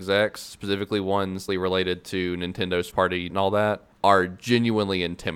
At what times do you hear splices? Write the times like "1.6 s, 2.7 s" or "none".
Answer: 1.5 s, 2.9 s, 3.3 s, 3.9 s